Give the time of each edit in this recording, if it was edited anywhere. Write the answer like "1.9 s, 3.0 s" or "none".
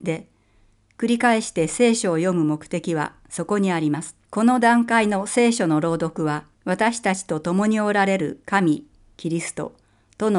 4.3 s, 6.5 s